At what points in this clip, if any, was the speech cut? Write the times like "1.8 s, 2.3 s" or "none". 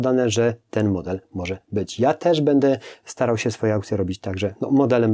none